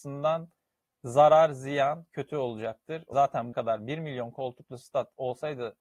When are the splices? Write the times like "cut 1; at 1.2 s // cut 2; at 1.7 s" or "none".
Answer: cut 1; at 3.1 s // cut 2; at 3.5 s